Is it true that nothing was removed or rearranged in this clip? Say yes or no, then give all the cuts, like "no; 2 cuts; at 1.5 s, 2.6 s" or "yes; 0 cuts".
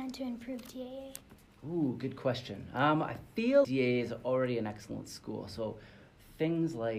no; 1 cut; at 3.6 s